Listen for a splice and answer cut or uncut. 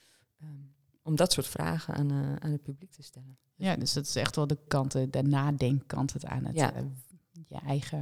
cut